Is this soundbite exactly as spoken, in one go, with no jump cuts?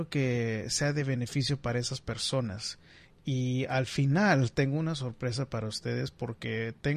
yes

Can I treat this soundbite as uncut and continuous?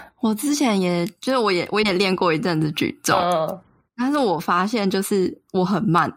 yes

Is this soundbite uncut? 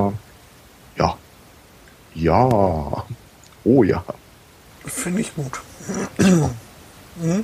yes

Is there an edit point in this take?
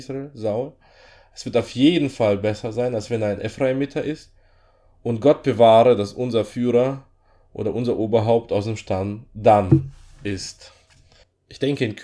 no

